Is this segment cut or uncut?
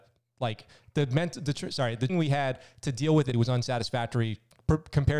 cut